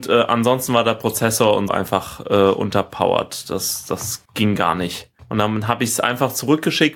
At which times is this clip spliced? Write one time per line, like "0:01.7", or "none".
0:01.7
0:04.3
0:05.2